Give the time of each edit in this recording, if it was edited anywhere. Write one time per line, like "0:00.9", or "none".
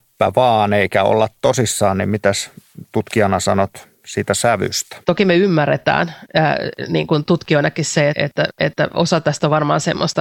0:05.0
0:08.1